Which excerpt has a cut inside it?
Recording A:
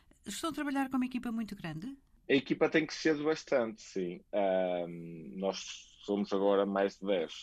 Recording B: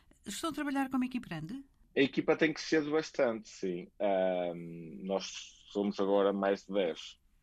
B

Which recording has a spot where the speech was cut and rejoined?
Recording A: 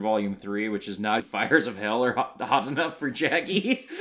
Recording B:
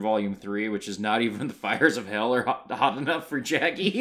A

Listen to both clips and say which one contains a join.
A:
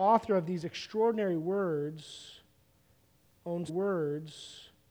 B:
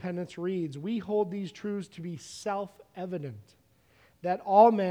A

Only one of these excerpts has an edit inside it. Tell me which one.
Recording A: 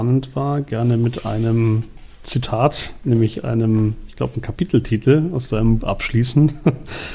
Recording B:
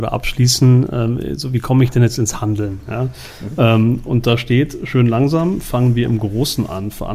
A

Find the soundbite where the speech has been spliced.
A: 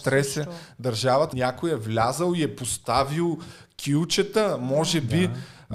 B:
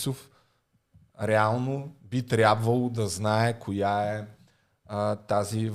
A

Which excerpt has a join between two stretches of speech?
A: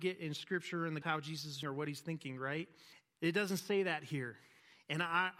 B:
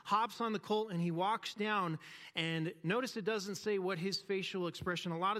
A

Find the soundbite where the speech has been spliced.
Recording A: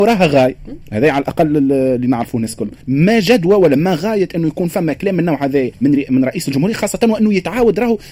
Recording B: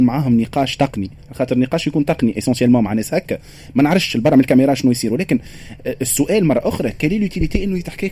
A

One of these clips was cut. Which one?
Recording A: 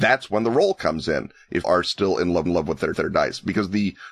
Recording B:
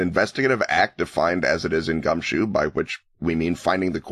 A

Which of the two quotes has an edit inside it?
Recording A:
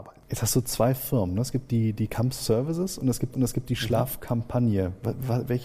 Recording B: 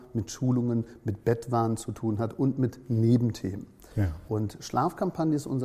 A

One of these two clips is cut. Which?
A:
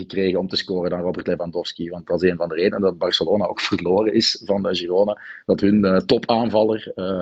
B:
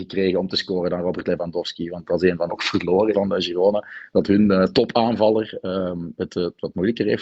B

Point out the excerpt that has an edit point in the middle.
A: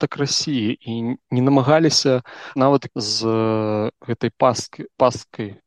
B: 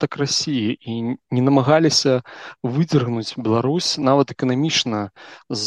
A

